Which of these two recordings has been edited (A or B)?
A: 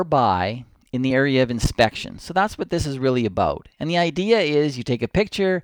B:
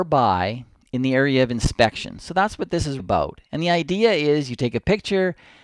B